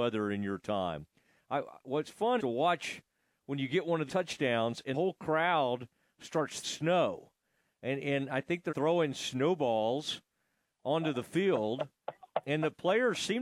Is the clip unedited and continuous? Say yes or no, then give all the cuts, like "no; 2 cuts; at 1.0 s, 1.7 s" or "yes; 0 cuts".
no; 5 cuts; at 2.4 s, 4.1 s, 4.9 s, 6.6 s, 8.7 s